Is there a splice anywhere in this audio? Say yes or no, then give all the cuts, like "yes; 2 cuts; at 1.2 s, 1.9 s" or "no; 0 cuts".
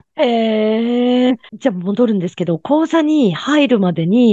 yes; 1 cut; at 1.3 s